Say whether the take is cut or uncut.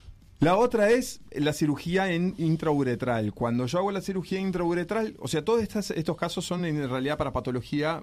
uncut